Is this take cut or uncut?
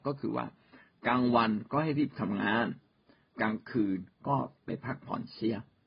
uncut